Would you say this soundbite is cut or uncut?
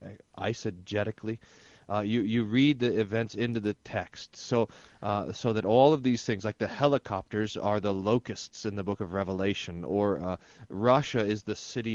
uncut